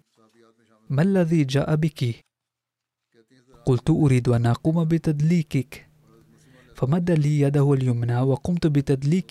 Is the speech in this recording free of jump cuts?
yes; 0 cuts

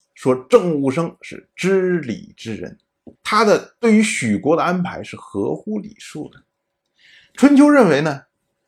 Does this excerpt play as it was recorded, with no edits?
no; 1 cut; at 3.2 s

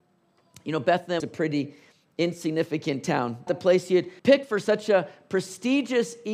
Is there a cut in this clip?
yes; 3 cuts; at 1.2 s, 3.5 s, 4.2 s

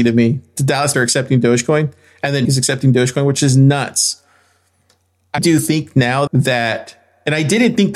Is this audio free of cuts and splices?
no; 4 cuts; at 0.9 s, 2.4 s, 5.4 s, 6.3 s

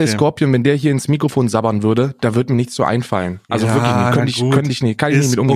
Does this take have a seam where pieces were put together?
no; 0 cuts

